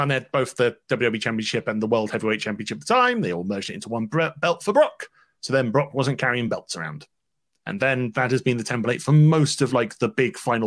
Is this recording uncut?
yes; 0 cuts

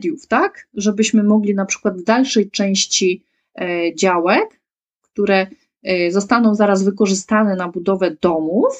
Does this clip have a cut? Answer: no; 0 cuts

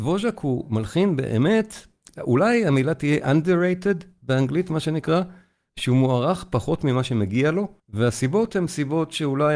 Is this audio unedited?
no; 1 cut; at 7.8 s

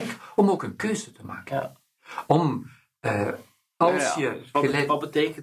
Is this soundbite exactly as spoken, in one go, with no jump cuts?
yes; 0 cuts

